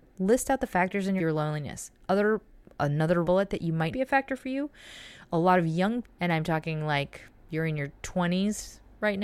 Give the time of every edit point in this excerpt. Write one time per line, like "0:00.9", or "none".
0:01.2
0:03.2
0:03.9
0:06.0